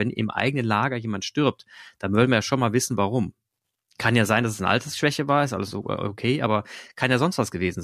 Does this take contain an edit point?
no; 0 cuts

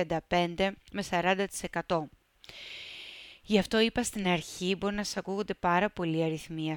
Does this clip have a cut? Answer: no; 0 cuts

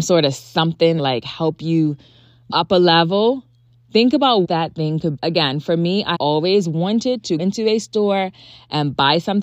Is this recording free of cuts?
no; 6 cuts; at 1.0 s, 2.5 s, 4.4 s, 5.2 s, 6.1 s, 7.4 s

